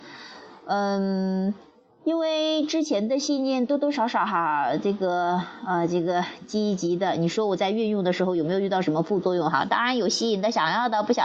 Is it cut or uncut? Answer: uncut